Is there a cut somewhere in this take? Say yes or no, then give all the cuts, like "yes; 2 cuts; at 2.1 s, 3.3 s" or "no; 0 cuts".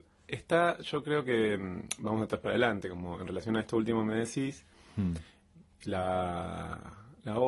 no; 0 cuts